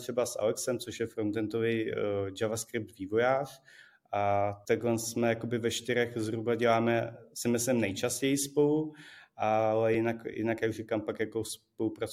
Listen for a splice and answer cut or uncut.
uncut